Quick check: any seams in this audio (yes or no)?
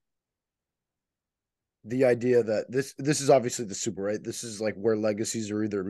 yes